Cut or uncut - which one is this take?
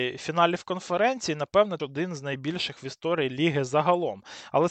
cut